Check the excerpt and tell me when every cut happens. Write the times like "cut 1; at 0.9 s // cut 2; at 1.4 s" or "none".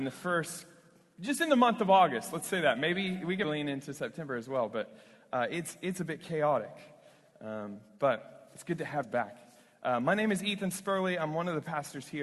cut 1; at 3.4 s // cut 2; at 9.0 s